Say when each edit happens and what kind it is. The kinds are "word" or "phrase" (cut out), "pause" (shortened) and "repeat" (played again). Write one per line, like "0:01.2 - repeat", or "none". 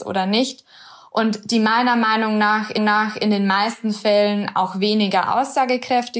0:02.8 - repeat